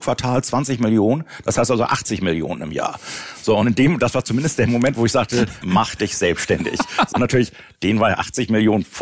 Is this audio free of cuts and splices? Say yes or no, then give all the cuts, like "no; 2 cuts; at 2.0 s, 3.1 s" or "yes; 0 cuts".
no; 2 cuts; at 5.6 s, 7.1 s